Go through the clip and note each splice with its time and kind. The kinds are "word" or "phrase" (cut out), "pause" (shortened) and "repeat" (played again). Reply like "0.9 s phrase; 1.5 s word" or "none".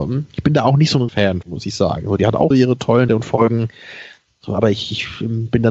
1.1 s word; 1.4 s word; 2.5 s word; 3.1 s word